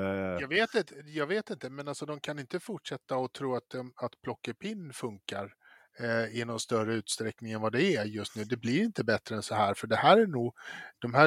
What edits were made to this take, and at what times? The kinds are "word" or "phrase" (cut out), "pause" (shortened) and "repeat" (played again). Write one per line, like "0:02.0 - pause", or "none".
none